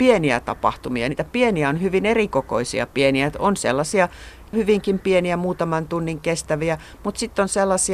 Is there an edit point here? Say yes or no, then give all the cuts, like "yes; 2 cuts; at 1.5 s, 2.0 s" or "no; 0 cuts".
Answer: yes; 1 cut; at 4.5 s